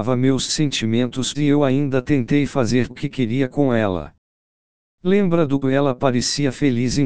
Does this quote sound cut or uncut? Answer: cut